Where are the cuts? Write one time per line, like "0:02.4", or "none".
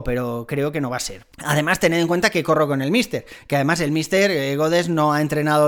0:01.3